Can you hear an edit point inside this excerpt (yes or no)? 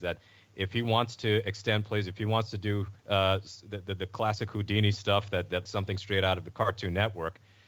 yes